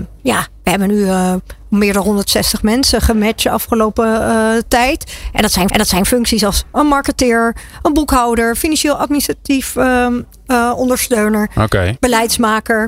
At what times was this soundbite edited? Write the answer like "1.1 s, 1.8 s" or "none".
5.7 s